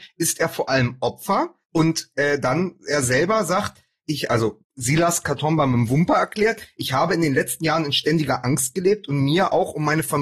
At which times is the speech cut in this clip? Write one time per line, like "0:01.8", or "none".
0:01.6
0:04.6

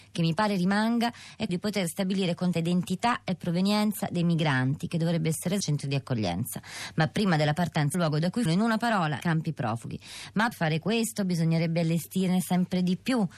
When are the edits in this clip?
0:01.5
0:02.5
0:05.6
0:07.9
0:08.5
0:09.2
0:10.5

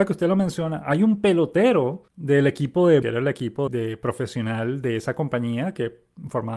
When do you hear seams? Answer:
0:02.1
0:03.0
0:03.7

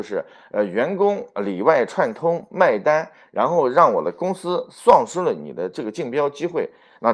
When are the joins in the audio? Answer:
none

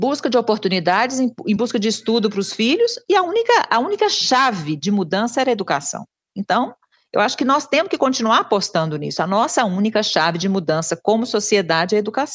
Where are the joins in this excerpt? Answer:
none

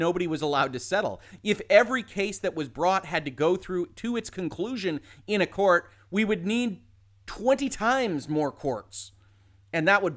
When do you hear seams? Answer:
none

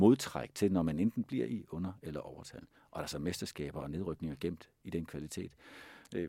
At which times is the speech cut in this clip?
0:03.0

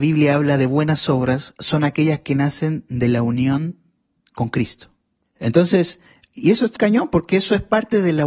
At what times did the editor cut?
0:06.8

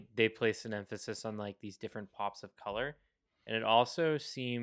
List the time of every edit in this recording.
none

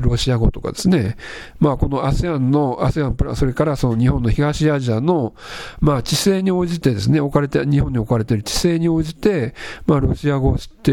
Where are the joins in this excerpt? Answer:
none

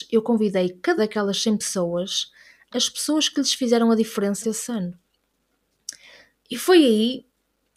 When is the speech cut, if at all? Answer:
0:01.0
0:02.7
0:04.4

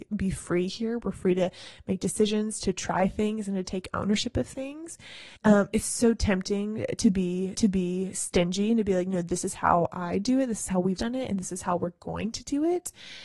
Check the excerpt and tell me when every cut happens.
0:05.4
0:07.5
0:11.0

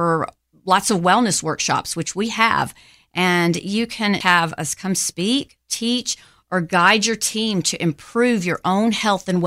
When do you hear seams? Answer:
0:04.2

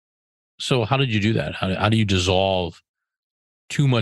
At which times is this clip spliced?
none

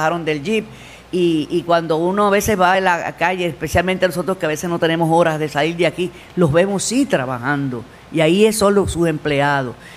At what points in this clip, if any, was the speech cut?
none

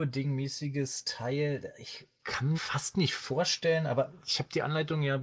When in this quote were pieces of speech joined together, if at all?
0:02.5

